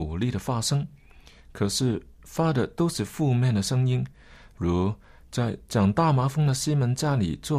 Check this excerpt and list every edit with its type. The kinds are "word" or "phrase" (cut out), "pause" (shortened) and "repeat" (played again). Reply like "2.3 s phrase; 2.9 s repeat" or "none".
none